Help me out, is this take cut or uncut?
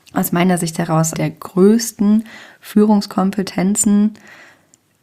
cut